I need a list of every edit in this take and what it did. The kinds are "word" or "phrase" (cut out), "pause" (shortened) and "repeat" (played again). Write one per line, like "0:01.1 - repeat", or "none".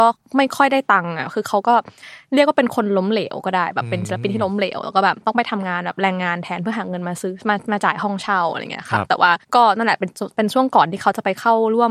0:09.4 - pause